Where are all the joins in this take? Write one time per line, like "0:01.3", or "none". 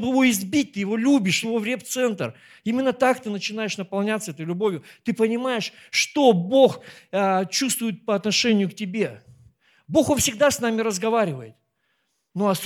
0:01.4